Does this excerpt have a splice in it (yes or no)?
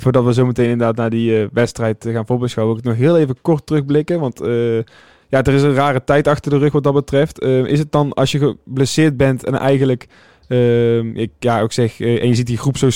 no